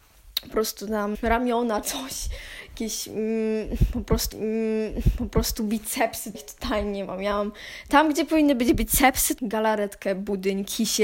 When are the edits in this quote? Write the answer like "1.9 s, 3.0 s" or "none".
1.1 s, 1.8 s, 4.3 s, 6.3 s, 9.4 s